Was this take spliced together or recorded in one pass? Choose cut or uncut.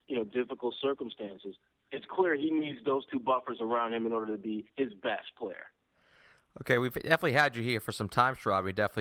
cut